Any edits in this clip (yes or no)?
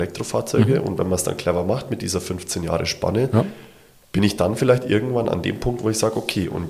no